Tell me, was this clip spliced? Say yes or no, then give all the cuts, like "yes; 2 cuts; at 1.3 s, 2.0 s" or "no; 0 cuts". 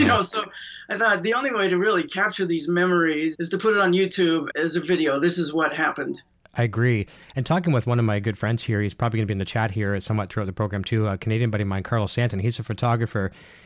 yes; 2 cuts; at 3.3 s, 4.5 s